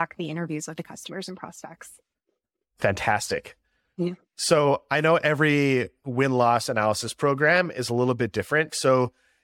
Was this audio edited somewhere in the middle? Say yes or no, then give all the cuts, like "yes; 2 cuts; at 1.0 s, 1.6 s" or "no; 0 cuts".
yes; 1 cut; at 6.0 s